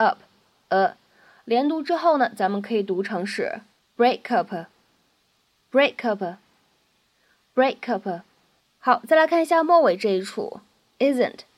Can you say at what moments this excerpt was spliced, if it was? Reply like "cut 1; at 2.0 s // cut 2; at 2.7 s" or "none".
none

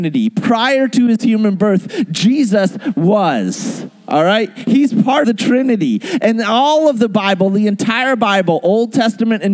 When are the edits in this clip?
cut 1; at 5.2 s

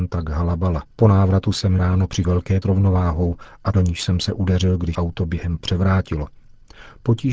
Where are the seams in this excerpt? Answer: cut 1; at 0.9 s // cut 2; at 1.8 s // cut 3; at 2.2 s // cut 4; at 2.6 s // cut 5; at 3.7 s // cut 6; at 4.9 s // cut 7; at 5.6 s

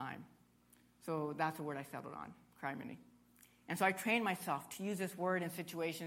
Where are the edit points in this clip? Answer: none

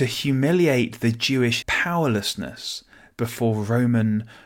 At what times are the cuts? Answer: cut 1; at 1.6 s

